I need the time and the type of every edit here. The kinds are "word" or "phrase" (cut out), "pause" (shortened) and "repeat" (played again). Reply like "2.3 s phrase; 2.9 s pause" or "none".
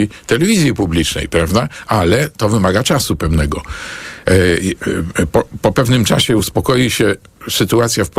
none

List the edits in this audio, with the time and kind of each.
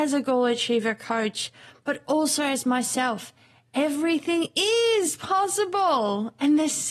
none

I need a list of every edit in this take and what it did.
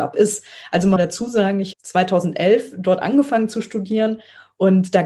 1.0 s phrase; 1.7 s word

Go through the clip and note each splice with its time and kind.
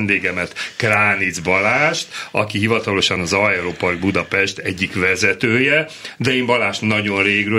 none

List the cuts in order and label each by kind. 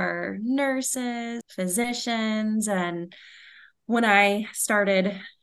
1.4 s word

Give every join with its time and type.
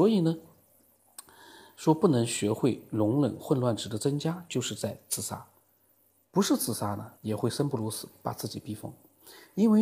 7.2 s pause

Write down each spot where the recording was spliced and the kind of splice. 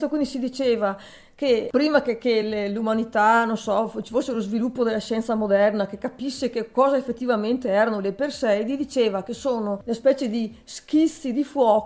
none

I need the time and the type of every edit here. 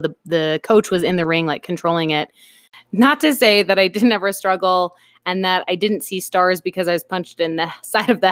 none

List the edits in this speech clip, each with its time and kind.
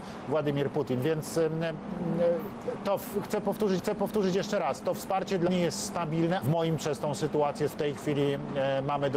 3.8 s repeat; 5.5 s word; 6.4 s word; 6.8 s phrase; 7.7 s word

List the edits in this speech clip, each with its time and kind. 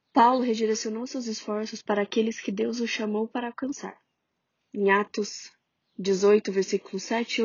none

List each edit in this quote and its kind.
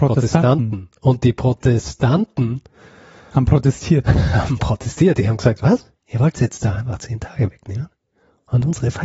none

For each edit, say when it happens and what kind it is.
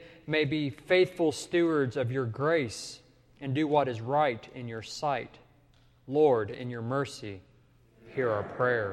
none

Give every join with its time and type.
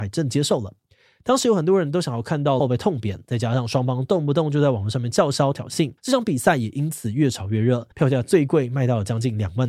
2.6 s phrase; 6.0 s pause; 7.9 s pause

